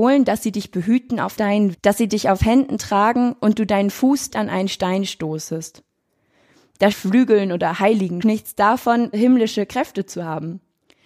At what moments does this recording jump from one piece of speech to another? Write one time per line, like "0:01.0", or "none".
0:01.4
0:01.7
0:04.3
0:06.9
0:08.2
0:09.1